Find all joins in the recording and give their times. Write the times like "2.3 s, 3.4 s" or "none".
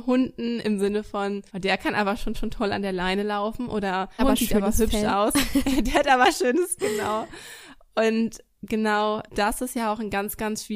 1.5 s, 2.3 s, 4.2 s, 6.8 s, 9.3 s